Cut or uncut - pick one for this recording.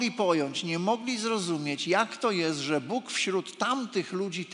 uncut